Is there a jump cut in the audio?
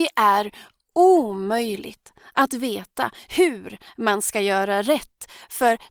no; 0 cuts

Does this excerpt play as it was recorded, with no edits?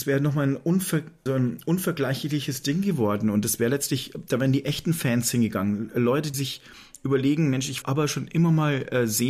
no; 3 cuts; at 1.3 s, 6.3 s, 7.8 s

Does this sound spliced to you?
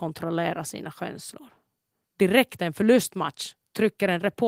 yes; 1 cut; at 2.6 s

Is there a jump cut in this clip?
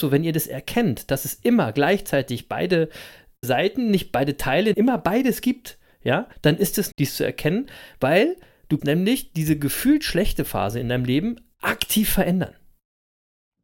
yes; 5 cuts; at 3.4 s, 4.7 s, 6.3 s, 6.9 s, 8.8 s

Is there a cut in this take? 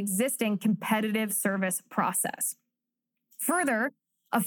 no; 0 cuts

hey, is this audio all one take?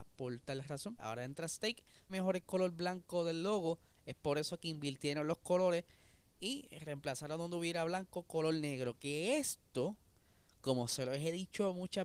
no; 3 cuts; at 1.0 s, 2.1 s, 6.4 s

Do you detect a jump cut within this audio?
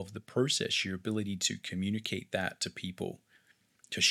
no; 0 cuts

